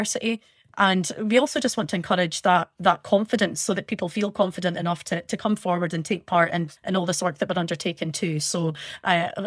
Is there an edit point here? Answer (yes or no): yes